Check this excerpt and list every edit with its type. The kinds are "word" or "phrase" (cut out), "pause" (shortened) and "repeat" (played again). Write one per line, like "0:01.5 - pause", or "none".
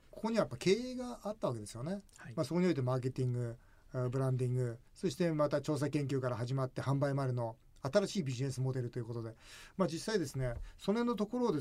0:04.9 - pause